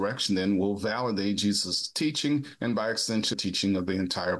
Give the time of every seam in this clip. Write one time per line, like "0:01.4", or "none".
0:03.3